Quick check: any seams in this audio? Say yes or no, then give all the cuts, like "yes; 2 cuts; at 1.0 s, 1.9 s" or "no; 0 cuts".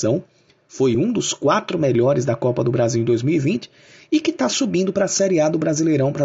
no; 0 cuts